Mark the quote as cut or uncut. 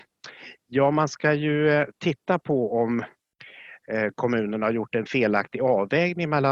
uncut